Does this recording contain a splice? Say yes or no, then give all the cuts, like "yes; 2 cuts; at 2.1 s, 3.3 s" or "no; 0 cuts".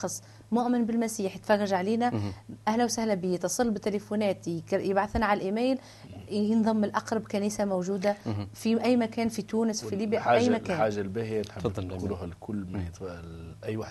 yes; 1 cut; at 9.8 s